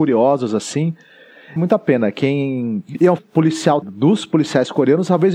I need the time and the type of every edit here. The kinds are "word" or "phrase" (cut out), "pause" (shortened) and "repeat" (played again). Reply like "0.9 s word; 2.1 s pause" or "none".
1.6 s word; 3.2 s word; 3.8 s word